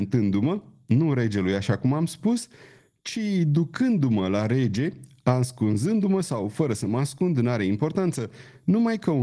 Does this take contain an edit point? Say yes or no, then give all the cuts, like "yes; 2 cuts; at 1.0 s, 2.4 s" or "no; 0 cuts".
no; 0 cuts